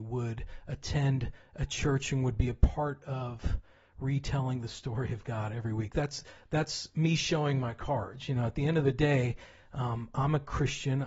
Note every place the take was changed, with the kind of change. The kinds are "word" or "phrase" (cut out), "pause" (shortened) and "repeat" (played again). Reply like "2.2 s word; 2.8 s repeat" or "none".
none